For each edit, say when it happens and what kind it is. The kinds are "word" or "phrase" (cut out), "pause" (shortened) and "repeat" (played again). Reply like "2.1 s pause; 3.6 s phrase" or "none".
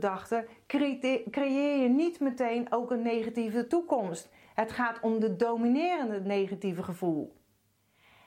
none